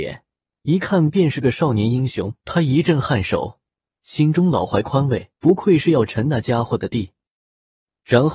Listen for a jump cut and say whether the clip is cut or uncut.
cut